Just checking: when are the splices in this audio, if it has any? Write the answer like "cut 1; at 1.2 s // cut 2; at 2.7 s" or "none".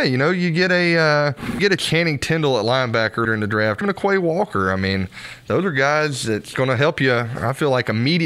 cut 1; at 1.6 s // cut 2; at 3.2 s // cut 3; at 3.8 s